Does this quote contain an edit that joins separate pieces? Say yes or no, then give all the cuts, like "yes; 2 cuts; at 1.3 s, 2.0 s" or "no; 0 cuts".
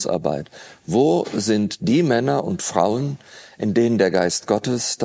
no; 0 cuts